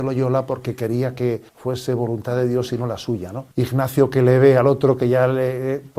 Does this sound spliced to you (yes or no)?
yes